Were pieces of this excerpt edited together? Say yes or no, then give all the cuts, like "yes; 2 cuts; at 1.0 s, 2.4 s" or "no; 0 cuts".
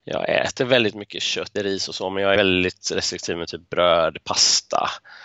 yes; 2 cuts; at 1.6 s, 2.4 s